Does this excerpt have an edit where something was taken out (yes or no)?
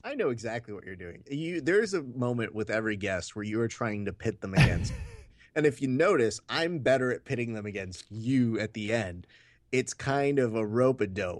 no